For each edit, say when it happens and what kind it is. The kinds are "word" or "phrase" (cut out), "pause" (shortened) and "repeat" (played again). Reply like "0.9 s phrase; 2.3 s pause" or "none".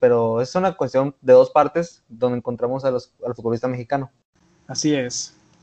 4.3 s pause